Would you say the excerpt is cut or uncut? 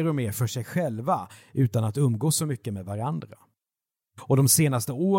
uncut